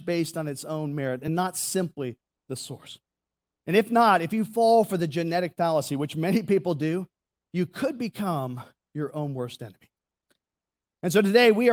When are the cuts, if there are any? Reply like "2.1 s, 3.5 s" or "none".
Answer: none